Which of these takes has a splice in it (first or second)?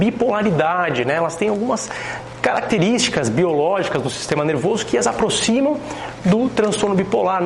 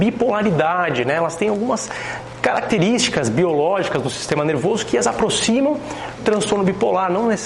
second